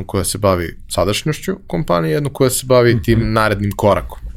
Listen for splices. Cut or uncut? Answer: uncut